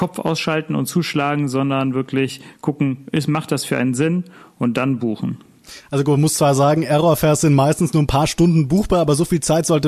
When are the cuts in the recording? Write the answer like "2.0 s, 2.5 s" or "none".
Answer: none

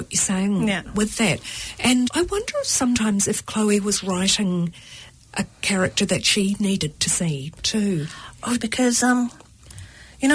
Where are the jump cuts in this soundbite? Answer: 2.0 s, 8.6 s

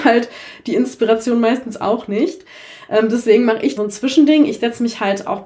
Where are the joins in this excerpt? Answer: 3.8 s

